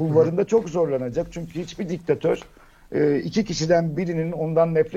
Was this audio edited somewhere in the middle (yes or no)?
no